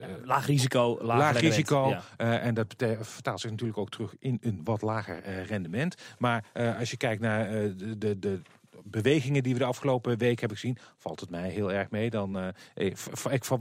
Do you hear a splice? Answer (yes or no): no